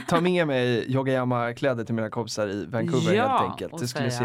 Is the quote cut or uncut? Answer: uncut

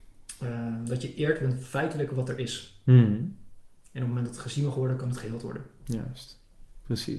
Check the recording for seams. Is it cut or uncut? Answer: uncut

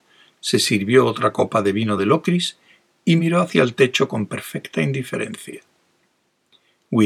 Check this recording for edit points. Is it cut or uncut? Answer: uncut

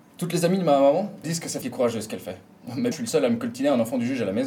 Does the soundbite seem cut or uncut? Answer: cut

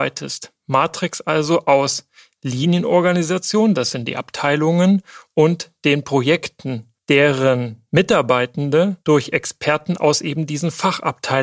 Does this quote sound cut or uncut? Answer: cut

